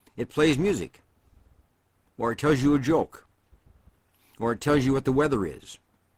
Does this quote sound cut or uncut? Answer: uncut